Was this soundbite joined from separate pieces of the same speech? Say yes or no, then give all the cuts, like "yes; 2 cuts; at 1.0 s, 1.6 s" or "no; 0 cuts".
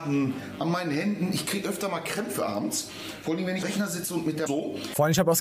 yes; 2 cuts; at 3.6 s, 4.5 s